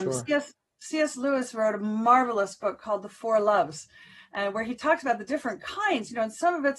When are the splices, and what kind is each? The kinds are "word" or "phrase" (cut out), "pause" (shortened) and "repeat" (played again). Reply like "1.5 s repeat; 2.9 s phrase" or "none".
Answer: none